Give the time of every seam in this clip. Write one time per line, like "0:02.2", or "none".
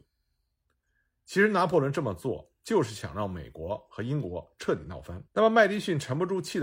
0:05.3